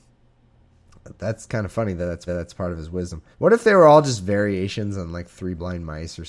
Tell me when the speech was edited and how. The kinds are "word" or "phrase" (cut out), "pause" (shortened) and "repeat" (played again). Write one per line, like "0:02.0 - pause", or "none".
0:02.3 - repeat
0:03.3 - pause